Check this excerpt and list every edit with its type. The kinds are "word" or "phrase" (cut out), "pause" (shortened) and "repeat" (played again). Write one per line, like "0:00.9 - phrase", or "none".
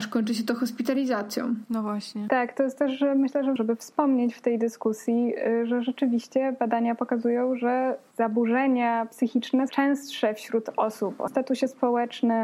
0:03.6 - word
0:09.7 - word
0:11.3 - word